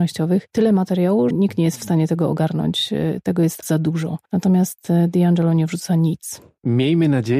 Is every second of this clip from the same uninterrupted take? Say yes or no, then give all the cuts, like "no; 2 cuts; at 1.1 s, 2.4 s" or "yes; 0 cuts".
no; 2 cuts; at 1.3 s, 3.6 s